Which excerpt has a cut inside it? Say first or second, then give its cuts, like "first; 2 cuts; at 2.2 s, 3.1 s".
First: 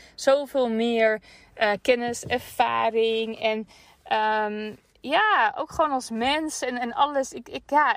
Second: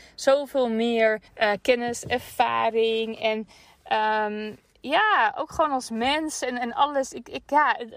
second; 1 cut; at 1.3 s